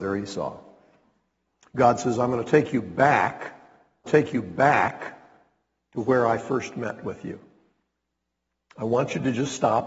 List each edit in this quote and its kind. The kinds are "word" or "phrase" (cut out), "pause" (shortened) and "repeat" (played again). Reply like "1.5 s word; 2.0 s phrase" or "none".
4.1 s repeat; 8.4 s pause

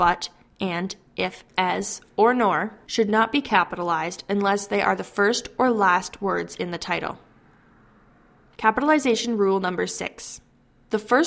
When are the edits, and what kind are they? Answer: none

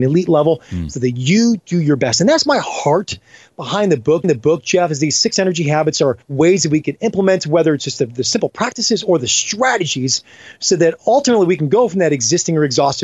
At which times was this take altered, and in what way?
4.2 s repeat; 6.2 s pause

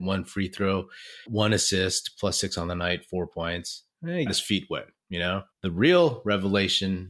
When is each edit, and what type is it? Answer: 1.3 s word; 4.3 s word; 5.5 s pause

